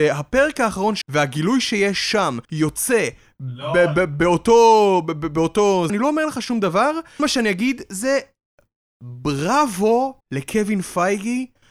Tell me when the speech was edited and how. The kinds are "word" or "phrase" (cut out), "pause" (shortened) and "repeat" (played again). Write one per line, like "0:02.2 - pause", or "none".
0:01.0 - word
0:02.4 - pause
0:05.9 - word
0:07.2 - word
0:10.2 - pause